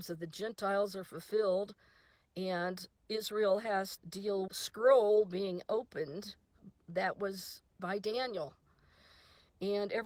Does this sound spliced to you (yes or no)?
yes